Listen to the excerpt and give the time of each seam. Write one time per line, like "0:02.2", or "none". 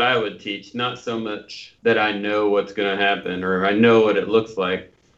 0:01.8